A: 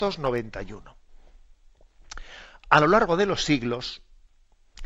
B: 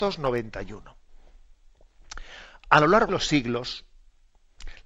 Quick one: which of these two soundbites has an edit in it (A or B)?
B